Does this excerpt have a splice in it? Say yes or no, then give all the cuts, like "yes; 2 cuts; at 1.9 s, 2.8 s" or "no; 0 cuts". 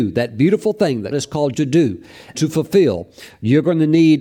yes; 3 cuts; at 1.1 s, 1.5 s, 2.3 s